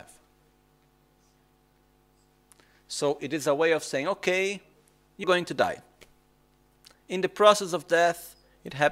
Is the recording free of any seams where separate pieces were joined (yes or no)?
no